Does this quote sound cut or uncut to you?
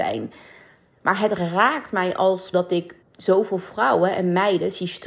cut